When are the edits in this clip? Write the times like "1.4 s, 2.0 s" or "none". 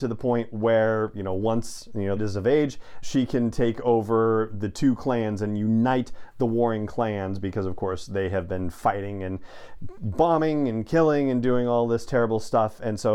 2.2 s, 3.0 s